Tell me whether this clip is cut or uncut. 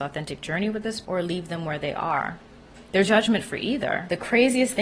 cut